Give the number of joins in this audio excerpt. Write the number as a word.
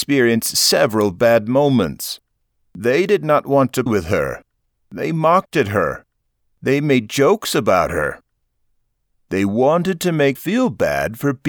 two